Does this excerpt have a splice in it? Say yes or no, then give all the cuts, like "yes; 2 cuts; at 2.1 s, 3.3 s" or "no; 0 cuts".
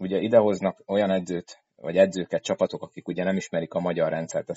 no; 0 cuts